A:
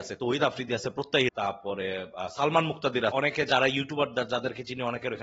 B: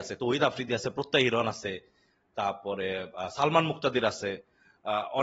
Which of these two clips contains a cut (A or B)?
A